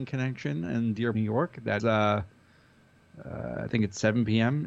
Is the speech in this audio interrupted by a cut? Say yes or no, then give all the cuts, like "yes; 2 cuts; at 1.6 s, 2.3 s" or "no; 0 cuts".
yes; 2 cuts; at 1.1 s, 1.8 s